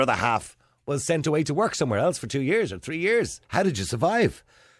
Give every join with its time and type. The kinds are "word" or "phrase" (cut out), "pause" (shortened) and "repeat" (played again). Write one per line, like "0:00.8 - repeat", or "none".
0:03.4 - pause

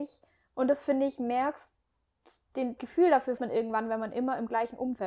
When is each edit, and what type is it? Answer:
0:02.8 - word
0:03.4 - word

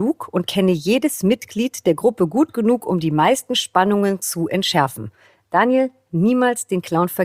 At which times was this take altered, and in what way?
none

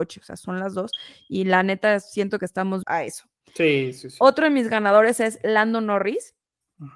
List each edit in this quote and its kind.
0:02.8 - phrase

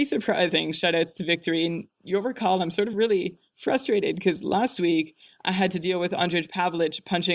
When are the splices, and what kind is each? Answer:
none

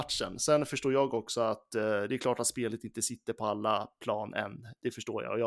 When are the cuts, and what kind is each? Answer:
none

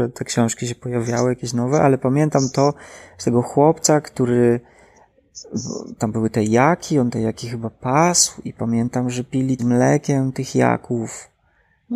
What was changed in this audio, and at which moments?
0:09.6 - phrase

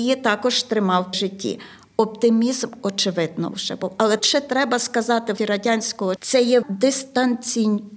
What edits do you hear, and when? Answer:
0:01.1 - word
0:03.5 - word
0:04.2 - word
0:05.4 - word
0:06.2 - word
0:06.6 - word

